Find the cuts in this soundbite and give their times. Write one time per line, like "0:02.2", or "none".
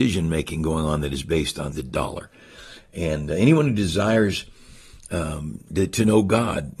0:01.7
0:05.1